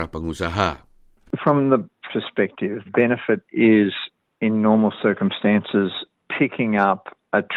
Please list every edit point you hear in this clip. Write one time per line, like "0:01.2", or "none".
0:02.1
0:02.9
0:04.2
0:06.2